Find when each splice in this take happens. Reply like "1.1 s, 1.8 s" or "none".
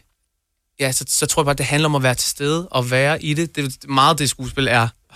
none